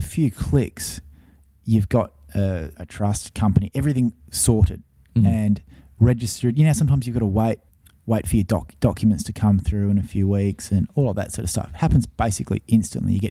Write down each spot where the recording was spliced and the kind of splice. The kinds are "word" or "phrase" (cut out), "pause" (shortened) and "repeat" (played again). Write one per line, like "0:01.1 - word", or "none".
0:02.7 - word
0:07.7 - word